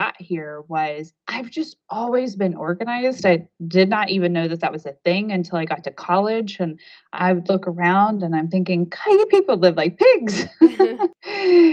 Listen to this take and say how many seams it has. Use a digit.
0